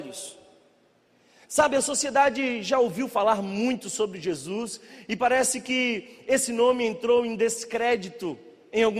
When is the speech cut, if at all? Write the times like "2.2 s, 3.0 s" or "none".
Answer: none